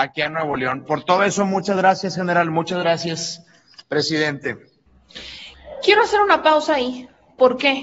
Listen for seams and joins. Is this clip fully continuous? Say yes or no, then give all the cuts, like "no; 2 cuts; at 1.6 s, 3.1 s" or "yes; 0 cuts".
yes; 0 cuts